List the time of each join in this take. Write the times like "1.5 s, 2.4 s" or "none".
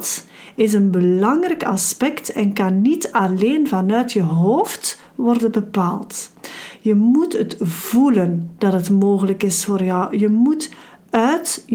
none